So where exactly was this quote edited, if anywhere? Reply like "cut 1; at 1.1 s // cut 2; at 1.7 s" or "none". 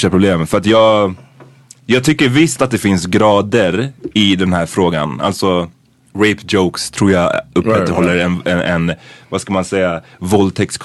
cut 1; at 6.0 s